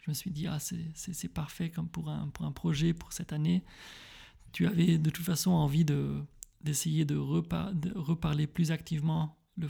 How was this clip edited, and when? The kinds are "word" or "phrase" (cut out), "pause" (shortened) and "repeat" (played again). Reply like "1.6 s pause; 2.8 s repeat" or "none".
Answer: 6.5 s pause